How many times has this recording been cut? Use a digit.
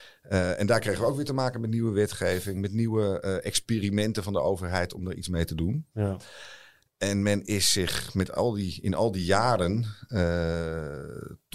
0